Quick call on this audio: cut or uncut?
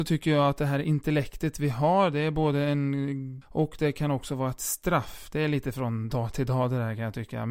cut